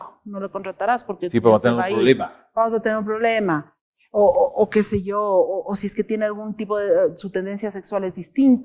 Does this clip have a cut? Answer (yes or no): no